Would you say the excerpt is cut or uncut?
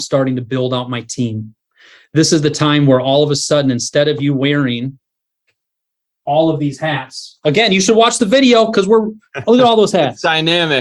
uncut